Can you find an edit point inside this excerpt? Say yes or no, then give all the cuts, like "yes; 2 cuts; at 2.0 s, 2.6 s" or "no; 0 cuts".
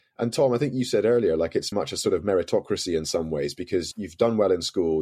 yes; 2 cuts; at 1.7 s, 3.9 s